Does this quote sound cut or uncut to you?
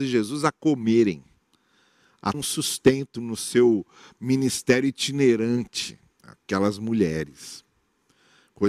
cut